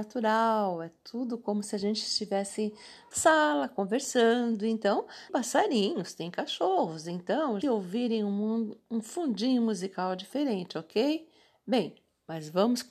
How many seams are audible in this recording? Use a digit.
3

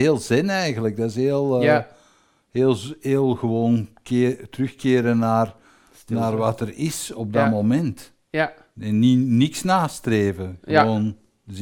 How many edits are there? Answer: 0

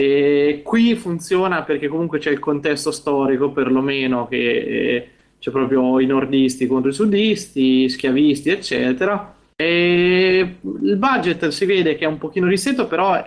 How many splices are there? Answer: 0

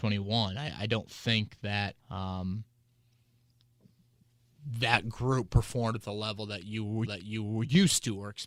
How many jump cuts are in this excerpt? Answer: 2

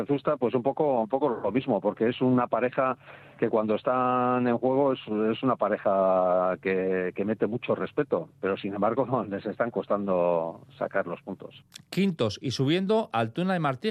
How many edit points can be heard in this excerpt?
0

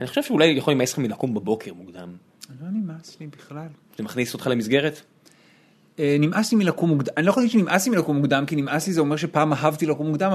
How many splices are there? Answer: 0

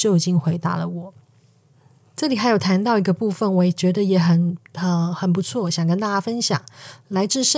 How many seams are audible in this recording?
1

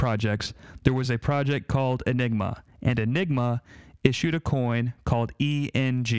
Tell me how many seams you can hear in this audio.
0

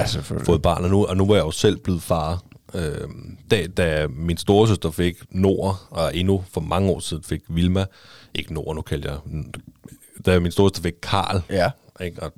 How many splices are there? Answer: 0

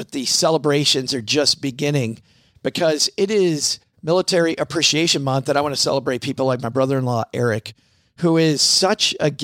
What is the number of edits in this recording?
0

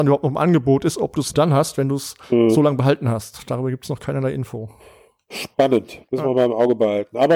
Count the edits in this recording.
2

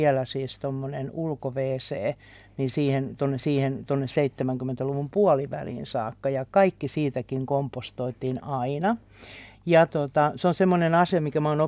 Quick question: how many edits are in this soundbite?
1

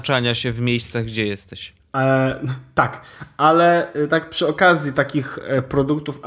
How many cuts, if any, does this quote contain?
0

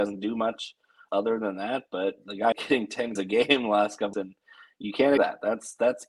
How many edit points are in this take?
5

